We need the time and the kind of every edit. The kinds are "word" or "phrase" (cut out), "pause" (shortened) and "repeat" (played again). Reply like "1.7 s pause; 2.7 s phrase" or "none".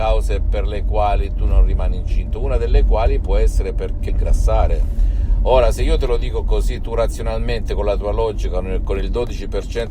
4.1 s phrase